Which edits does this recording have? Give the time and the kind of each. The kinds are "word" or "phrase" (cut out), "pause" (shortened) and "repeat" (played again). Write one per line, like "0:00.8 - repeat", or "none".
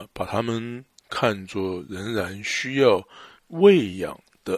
0:03.4 - pause